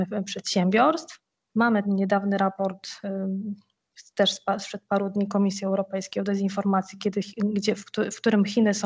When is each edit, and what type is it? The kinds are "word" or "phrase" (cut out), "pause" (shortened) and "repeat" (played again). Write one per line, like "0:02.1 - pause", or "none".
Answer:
0:01.8 - word